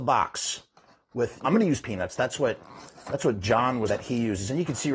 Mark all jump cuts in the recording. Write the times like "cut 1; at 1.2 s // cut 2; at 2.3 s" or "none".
cut 1; at 1.4 s // cut 2; at 1.8 s // cut 3; at 3.9 s